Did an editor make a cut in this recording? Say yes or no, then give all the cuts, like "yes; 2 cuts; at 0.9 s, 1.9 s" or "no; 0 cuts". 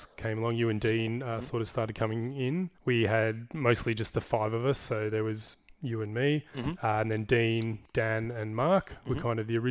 yes; 1 cut; at 2.7 s